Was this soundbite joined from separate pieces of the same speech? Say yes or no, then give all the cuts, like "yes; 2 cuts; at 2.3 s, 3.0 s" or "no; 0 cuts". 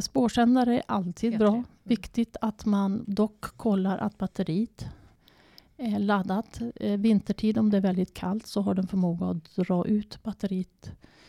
no; 0 cuts